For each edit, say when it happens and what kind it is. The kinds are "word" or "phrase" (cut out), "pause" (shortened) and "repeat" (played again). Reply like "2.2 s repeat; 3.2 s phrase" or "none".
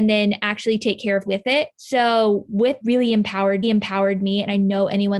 1.3 s word; 1.7 s pause; 2.8 s phrase; 3.6 s repeat

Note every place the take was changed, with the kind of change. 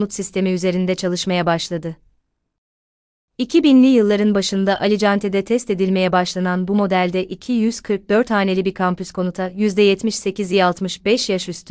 none

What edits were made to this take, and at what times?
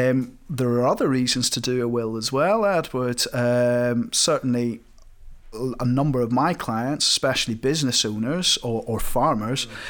none

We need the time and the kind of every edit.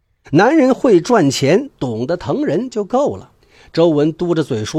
3.4 s pause

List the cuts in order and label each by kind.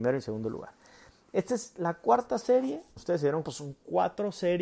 3.0 s phrase; 3.4 s word

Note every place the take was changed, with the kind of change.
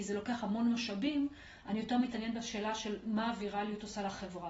none

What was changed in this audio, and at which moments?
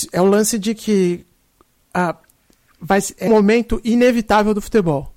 3.3 s word

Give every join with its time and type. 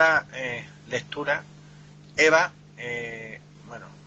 none

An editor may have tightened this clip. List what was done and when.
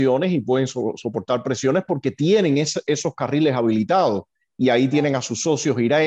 none

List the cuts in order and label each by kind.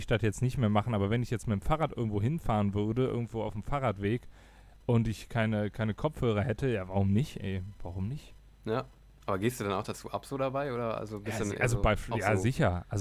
none

